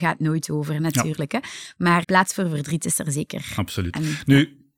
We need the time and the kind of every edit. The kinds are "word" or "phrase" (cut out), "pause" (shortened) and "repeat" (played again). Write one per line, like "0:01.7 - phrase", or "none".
0:02.0 - word